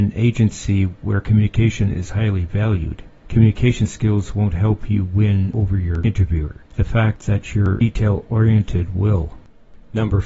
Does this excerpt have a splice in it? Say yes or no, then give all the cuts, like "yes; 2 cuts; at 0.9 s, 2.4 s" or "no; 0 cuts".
no; 0 cuts